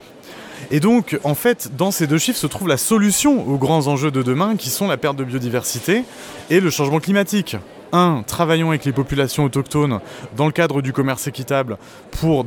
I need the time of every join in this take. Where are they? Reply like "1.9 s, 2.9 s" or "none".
1.2 s